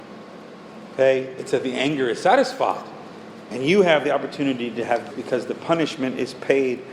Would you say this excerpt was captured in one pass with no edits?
no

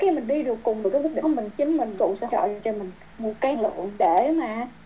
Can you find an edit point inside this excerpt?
yes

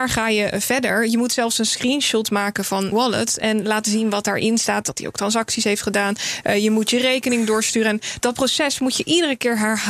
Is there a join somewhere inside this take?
yes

